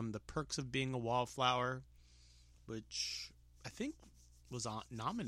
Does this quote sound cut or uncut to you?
uncut